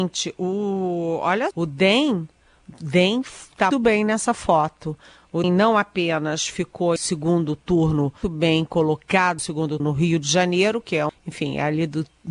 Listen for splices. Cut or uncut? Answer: cut